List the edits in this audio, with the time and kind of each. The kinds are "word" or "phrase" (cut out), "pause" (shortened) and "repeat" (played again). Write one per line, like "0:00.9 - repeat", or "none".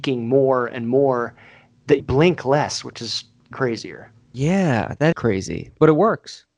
0:02.0 - word
0:03.5 - word
0:05.1 - word